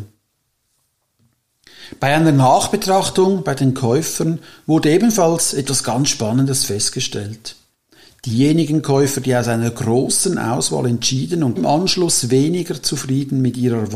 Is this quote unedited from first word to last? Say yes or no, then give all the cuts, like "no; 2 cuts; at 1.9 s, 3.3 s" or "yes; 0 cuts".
no; 1 cut; at 11.6 s